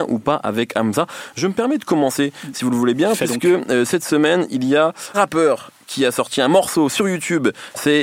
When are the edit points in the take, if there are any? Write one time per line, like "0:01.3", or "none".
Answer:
0:05.1

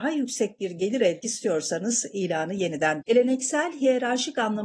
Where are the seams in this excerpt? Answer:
0:01.2
0:03.0

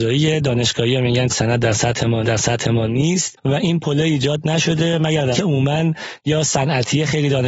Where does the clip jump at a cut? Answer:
0:01.3
0:02.2
0:05.3

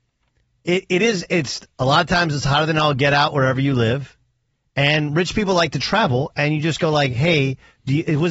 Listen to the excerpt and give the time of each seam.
none

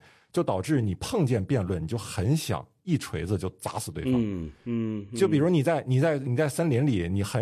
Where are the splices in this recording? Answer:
none

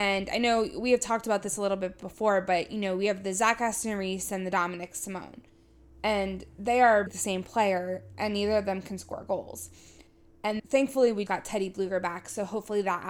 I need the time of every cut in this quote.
0:07.1
0:10.6
0:11.3

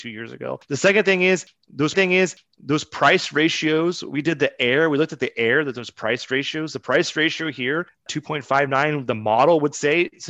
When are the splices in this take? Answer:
0:01.9

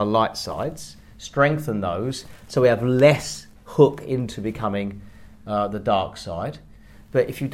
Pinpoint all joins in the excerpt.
0:03.6

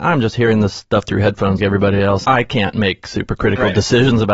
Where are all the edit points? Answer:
0:01.6
0:02.2

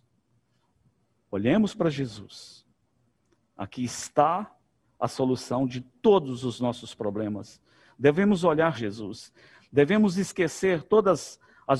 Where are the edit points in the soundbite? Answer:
0:08.7

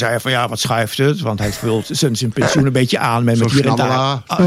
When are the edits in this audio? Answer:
none

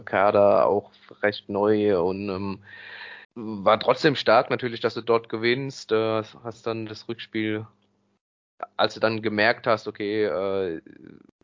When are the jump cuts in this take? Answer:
0:03.2

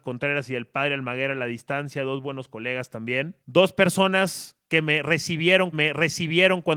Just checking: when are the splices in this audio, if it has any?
0:03.4
0:05.7

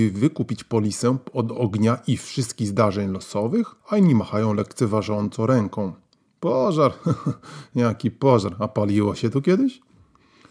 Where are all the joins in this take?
0:03.8

